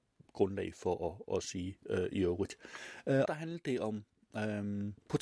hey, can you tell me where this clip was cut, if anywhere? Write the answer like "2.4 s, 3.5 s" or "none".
3.2 s